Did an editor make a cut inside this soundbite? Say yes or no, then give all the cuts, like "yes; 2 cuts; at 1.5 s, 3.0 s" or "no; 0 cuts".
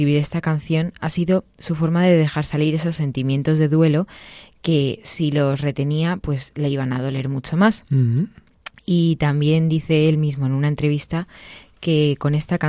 no; 0 cuts